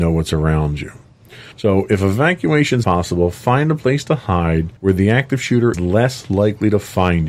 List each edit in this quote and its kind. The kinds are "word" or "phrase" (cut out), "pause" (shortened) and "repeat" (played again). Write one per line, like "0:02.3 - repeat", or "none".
0:01.5 - pause
0:02.8 - word
0:04.8 - pause
0:05.7 - word